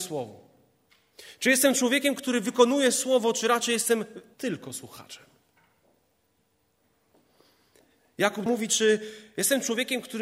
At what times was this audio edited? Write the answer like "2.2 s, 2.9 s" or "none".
4.3 s, 8.5 s